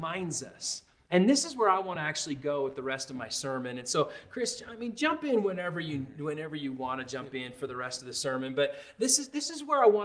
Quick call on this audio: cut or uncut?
uncut